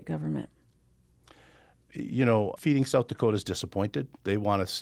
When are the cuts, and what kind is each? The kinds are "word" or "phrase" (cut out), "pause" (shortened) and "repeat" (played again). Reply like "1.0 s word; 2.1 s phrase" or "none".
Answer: 2.6 s word